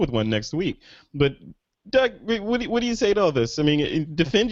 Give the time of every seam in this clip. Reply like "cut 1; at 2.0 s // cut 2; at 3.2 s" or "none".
none